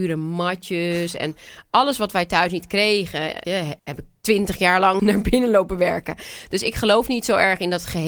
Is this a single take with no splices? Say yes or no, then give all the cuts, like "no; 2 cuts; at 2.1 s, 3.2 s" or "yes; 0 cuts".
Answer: no; 3 cuts; at 3.4 s, 3.8 s, 5.0 s